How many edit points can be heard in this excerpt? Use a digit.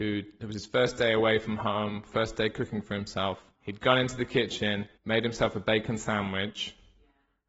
2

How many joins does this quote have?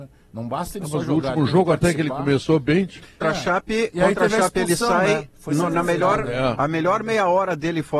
1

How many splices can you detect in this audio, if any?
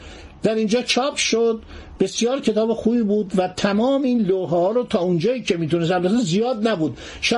0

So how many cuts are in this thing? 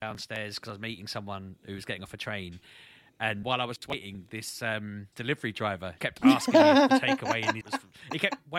4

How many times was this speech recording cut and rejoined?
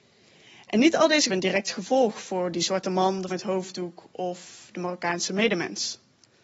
2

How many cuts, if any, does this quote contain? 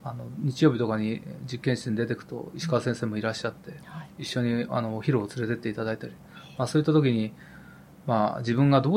0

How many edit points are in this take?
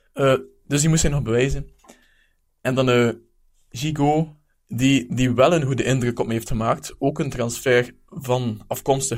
0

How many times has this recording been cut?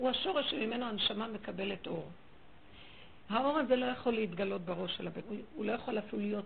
1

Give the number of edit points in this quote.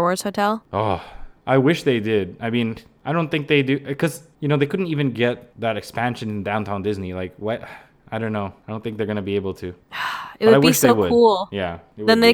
0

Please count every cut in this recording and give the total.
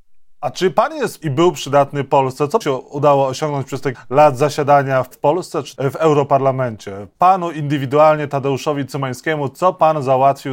5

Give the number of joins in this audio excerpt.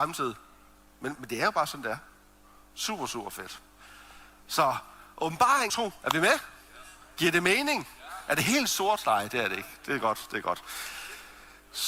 2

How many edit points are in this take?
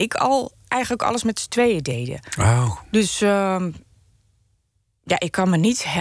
0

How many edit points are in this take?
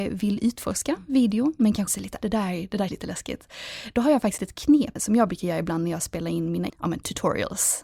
6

